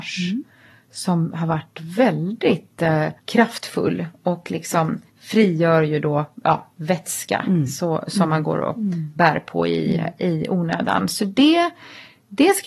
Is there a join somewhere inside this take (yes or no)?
yes